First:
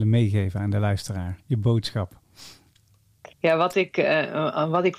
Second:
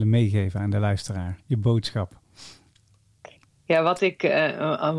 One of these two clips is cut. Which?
first; 1 cut; at 3.3 s

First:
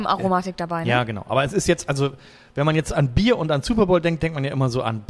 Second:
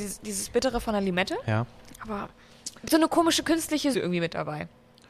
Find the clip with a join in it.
second; 2 cuts; at 2.9 s, 3.9 s

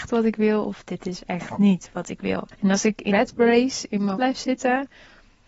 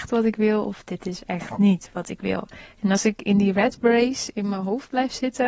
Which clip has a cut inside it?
first; 3 cuts; at 2.5 s, 3.1 s, 4.1 s

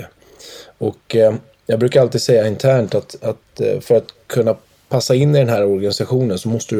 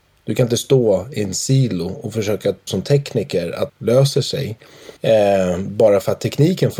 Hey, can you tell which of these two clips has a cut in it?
second; 3 cuts; at 2.7 s, 3.7 s, 5.0 s

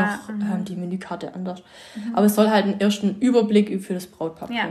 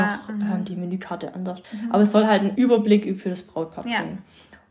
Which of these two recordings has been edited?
second; 2 cuts; at 1.6 s, 2.6 s

